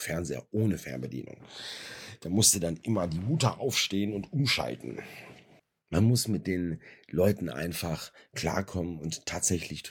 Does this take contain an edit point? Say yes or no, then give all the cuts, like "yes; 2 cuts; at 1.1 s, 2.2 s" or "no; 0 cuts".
no; 0 cuts